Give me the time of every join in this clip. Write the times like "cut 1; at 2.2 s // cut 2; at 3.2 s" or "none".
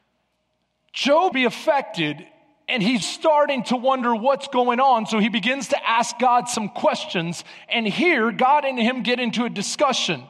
cut 1; at 1.3 s // cut 2; at 3.0 s